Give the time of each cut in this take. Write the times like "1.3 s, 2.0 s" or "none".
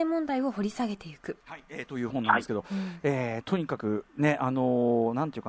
1.4 s